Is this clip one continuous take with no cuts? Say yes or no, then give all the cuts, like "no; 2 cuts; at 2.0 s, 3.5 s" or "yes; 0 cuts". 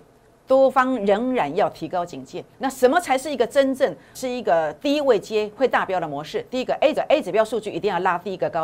no; 3 cuts; at 2.5 s, 4.1 s, 7.0 s